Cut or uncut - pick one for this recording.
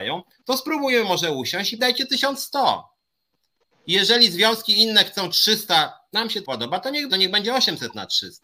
cut